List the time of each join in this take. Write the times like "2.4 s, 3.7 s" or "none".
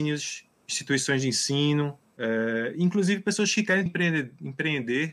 3.9 s